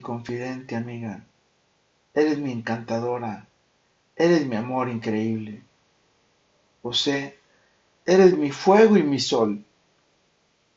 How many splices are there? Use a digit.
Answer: 0